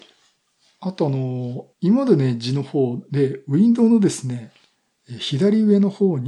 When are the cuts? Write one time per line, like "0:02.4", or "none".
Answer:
0:01.7